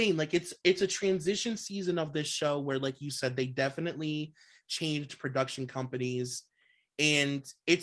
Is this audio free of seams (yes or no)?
yes